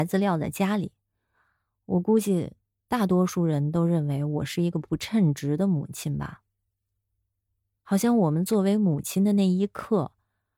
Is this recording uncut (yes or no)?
yes